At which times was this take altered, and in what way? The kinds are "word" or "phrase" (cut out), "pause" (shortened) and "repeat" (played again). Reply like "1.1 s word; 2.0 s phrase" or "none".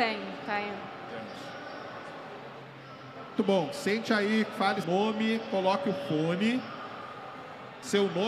3.4 s word; 4.8 s word